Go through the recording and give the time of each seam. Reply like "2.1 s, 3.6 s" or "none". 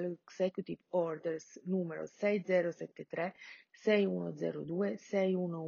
none